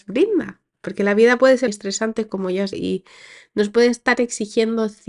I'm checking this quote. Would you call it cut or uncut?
cut